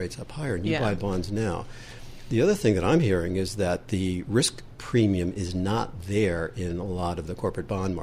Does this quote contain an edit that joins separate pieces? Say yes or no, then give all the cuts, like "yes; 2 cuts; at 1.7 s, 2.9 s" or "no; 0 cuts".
no; 0 cuts